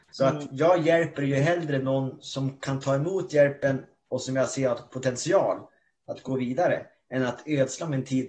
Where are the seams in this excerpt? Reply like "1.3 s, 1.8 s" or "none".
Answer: none